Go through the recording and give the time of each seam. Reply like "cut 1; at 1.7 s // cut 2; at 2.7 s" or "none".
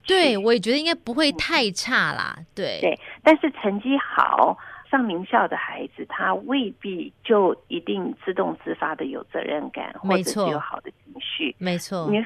cut 1; at 4.8 s // cut 2; at 7.2 s